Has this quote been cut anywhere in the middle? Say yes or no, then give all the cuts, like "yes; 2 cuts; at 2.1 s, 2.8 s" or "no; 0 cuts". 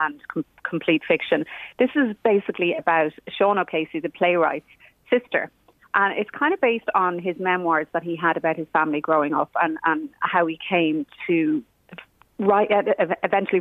no; 0 cuts